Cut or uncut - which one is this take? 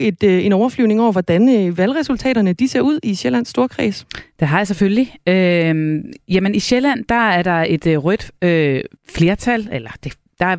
cut